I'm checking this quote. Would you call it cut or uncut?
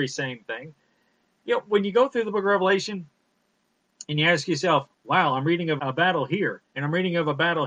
cut